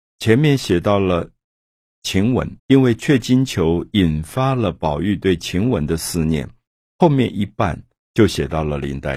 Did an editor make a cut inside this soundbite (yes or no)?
yes